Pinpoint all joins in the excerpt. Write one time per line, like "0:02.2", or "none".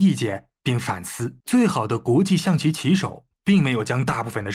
0:01.4
0:03.3